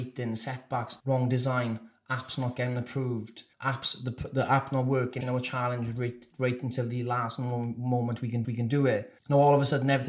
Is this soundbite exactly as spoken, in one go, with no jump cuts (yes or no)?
no